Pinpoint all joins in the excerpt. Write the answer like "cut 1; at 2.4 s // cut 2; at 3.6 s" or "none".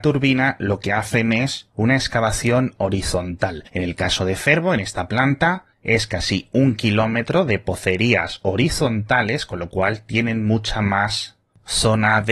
cut 1; at 1.7 s // cut 2; at 3.7 s // cut 3; at 5.7 s